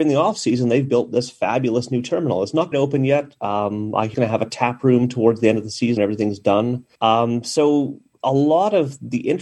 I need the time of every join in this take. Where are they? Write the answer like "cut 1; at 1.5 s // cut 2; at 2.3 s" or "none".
cut 1; at 2.7 s // cut 2; at 4.1 s // cut 3; at 6.0 s // cut 4; at 6.9 s